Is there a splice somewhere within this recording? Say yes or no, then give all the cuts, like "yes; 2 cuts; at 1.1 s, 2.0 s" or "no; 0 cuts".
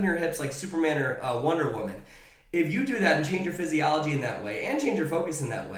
no; 0 cuts